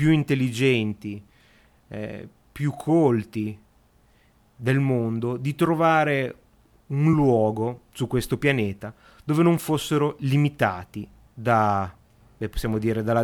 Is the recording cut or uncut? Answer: uncut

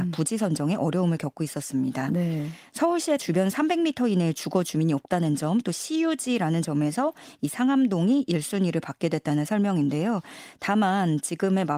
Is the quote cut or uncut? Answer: cut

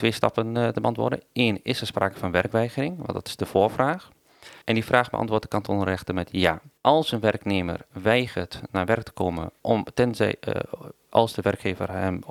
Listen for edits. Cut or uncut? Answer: cut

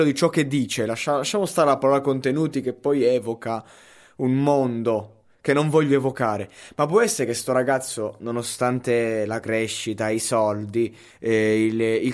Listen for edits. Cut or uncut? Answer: uncut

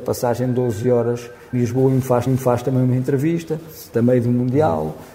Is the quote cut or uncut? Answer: cut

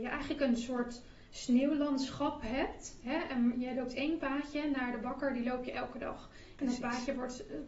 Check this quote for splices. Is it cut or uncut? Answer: uncut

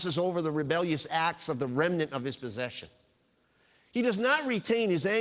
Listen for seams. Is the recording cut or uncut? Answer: uncut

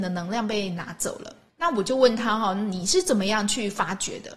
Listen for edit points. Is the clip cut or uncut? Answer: cut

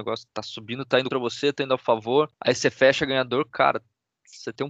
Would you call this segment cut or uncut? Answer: cut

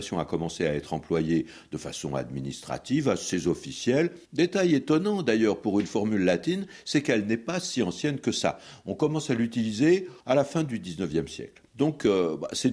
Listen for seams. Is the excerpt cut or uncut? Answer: cut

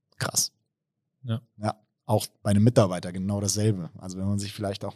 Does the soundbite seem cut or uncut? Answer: uncut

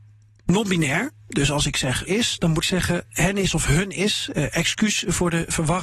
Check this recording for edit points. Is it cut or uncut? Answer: cut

